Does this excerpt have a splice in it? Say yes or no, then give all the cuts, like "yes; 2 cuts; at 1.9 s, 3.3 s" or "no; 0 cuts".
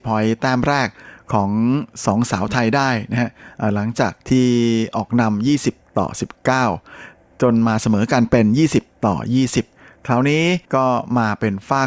yes; 1 cut; at 10.6 s